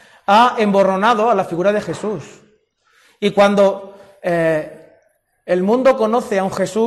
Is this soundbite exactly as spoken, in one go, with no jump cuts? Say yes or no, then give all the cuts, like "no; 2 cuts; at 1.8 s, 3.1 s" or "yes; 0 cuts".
yes; 0 cuts